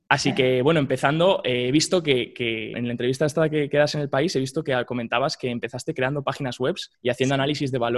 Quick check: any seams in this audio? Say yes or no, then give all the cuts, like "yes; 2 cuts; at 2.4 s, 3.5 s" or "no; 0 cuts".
yes; 2 cuts; at 2.7 s, 6.9 s